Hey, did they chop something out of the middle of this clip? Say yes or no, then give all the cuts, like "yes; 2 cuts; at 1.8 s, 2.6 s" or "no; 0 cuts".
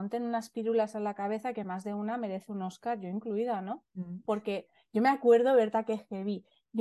no; 0 cuts